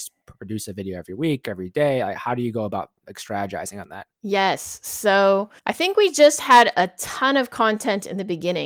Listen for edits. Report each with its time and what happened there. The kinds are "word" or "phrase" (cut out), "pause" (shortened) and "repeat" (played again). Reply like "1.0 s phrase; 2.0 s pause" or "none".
4.1 s pause; 5.6 s pause